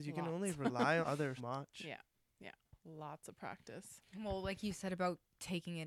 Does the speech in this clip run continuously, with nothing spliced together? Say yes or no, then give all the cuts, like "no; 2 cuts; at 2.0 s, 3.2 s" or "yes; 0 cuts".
no; 3 cuts; at 1.0 s, 1.4 s, 2.8 s